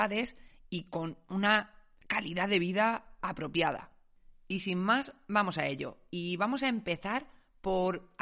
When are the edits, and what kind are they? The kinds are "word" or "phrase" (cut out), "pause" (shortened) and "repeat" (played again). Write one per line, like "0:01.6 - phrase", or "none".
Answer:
none

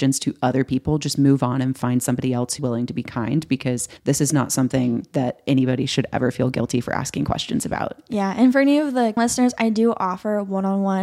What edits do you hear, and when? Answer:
0:02.6 - word
0:04.0 - pause
0:09.2 - word

